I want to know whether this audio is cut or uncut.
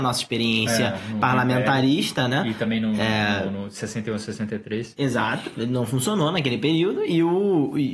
uncut